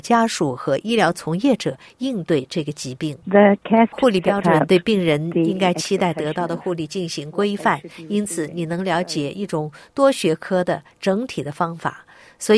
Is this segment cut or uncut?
cut